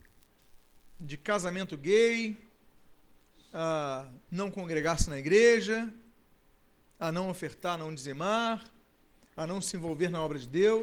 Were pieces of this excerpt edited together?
no; 0 cuts

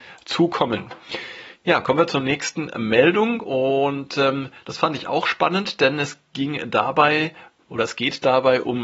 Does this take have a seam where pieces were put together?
no; 0 cuts

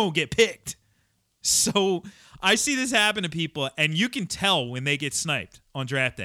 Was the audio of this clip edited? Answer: no; 0 cuts

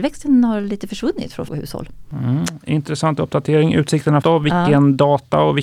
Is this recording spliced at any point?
yes; 2 cuts; at 1.5 s, 4.2 s

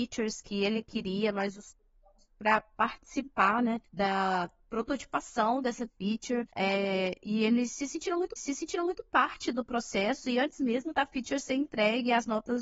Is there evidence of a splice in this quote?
yes; 3 cuts; at 3.9 s, 6.5 s, 8.4 s

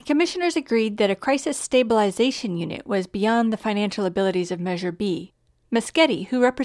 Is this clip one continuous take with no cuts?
yes; 0 cuts

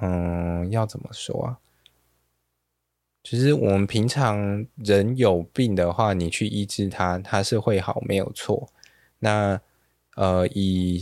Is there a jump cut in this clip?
no; 0 cuts

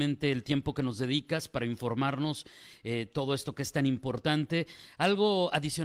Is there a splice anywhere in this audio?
no; 0 cuts

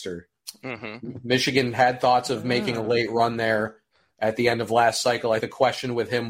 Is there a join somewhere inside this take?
yes; 1 cut; at 5.4 s

